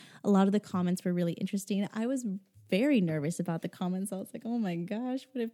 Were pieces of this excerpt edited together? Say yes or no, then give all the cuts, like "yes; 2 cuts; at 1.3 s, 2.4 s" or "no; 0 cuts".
no; 0 cuts